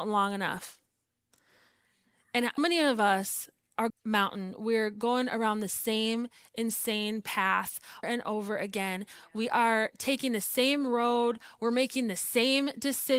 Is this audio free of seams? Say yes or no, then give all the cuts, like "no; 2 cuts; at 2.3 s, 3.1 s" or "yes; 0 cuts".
no; 3 cuts; at 2.6 s, 3.9 s, 8.0 s